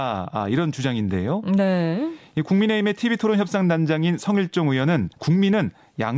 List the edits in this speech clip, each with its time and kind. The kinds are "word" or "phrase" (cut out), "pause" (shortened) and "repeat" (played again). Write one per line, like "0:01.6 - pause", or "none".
0:05.1 - pause